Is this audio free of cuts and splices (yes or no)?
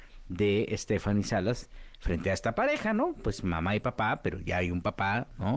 yes